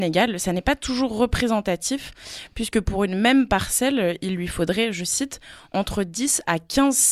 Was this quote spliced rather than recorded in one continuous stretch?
no; 0 cuts

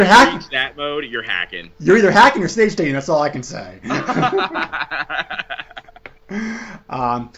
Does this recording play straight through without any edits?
yes; 0 cuts

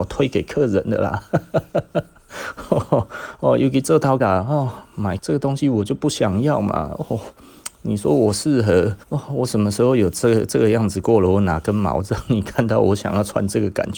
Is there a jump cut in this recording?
yes; 3 cuts; at 4.2 s, 5.2 s, 9.0 s

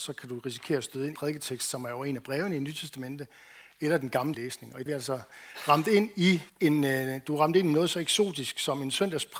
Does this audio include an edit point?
yes; 4 cuts; at 1.2 s, 4.3 s, 4.9 s, 6.5 s

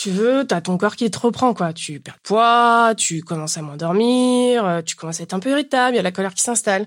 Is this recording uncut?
no; 1 cut; at 2.2 s

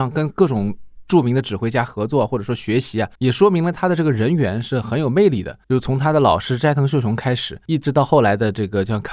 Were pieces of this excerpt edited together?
yes; 3 cuts; at 3.2 s, 5.6 s, 7.7 s

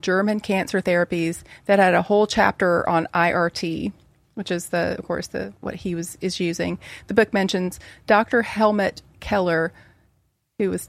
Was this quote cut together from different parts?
yes; 2 cuts; at 5.6 s, 6.2 s

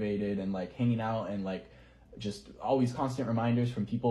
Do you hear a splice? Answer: no; 0 cuts

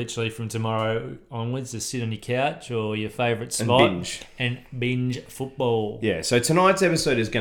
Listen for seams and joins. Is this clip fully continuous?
yes; 0 cuts

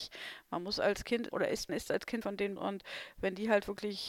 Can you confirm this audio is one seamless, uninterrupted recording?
no; 4 cuts; at 1.3 s, 1.7 s, 2.2 s, 2.6 s

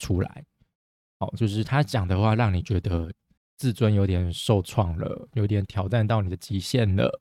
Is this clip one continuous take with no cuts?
no; 1 cut; at 3.4 s

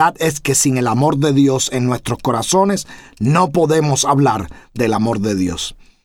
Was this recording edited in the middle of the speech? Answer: no; 0 cuts

